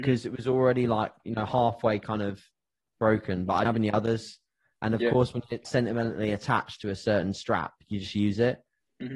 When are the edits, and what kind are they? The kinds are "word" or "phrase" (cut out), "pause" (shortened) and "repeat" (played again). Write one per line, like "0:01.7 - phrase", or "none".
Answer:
0:03.6 - word
0:05.6 - word